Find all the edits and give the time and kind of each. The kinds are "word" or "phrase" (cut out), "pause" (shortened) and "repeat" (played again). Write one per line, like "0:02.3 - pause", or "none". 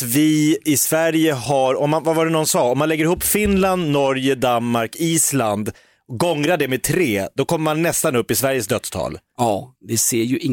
none